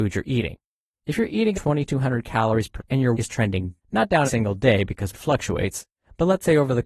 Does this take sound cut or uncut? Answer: cut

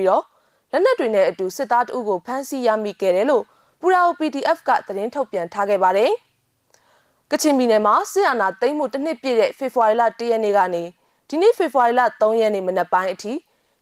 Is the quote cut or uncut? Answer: uncut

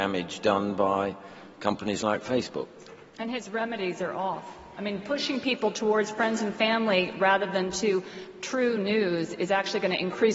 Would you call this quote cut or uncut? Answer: uncut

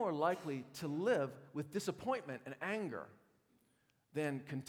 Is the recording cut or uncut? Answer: uncut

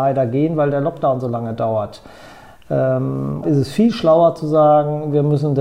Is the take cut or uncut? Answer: cut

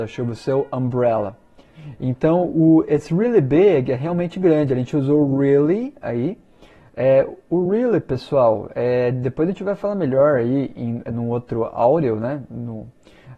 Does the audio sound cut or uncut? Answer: uncut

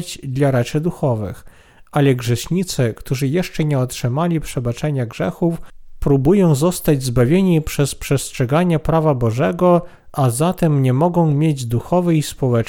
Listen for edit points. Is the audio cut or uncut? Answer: uncut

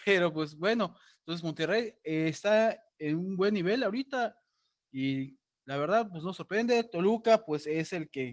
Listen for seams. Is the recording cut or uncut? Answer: uncut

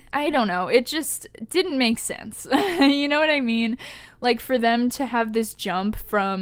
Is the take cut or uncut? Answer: uncut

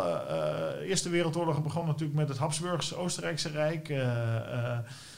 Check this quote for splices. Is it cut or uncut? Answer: uncut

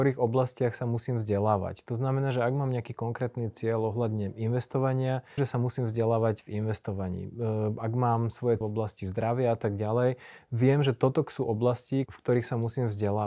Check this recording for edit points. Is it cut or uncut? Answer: cut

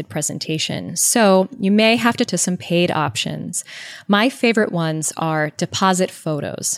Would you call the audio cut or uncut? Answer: cut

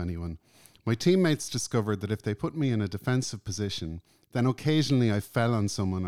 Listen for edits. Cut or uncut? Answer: uncut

